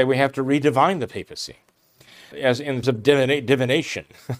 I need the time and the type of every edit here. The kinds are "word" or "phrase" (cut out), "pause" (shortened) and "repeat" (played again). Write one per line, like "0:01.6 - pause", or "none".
0:02.3 - word
0:02.8 - word